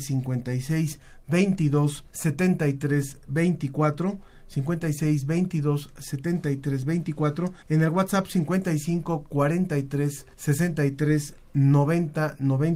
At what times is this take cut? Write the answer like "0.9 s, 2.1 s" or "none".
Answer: 2.1 s, 7.6 s, 10.3 s

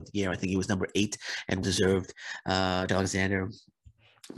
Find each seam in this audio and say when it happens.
1.6 s, 2.9 s

